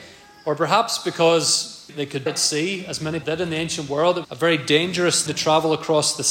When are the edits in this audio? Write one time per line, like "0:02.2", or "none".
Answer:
0:01.9
0:02.3
0:03.2
0:04.2
0:05.3